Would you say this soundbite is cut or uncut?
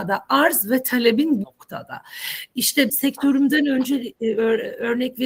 cut